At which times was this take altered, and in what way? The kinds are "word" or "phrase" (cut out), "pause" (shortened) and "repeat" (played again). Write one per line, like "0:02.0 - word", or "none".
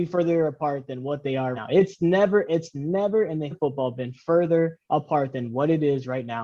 0:01.5 - word
0:03.5 - word
0:04.8 - pause